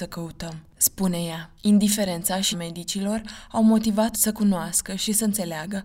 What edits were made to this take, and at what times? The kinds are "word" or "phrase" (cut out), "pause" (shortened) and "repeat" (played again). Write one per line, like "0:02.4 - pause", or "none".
0:01.6 - pause
0:02.5 - word
0:04.1 - phrase